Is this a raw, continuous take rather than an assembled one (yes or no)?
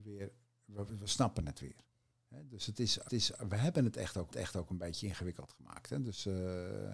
no